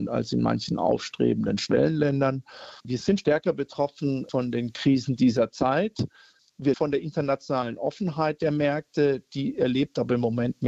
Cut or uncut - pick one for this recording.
cut